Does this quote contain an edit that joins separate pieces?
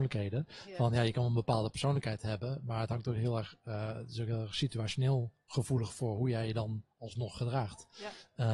no; 0 cuts

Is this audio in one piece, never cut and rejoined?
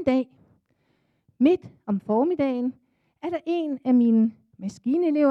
yes; 0 cuts

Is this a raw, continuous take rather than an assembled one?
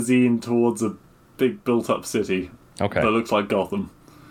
yes; 0 cuts

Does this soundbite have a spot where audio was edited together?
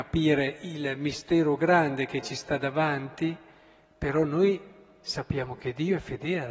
no; 0 cuts

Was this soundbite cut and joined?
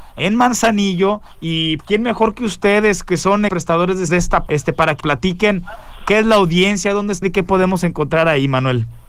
yes; 6 cuts; at 1.8 s, 3.5 s, 4.1 s, 4.5 s, 5.0 s, 7.2 s

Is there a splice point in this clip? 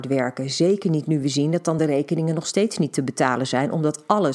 no; 0 cuts

